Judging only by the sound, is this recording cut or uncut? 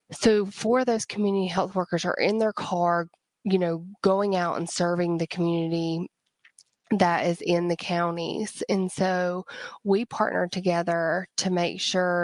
cut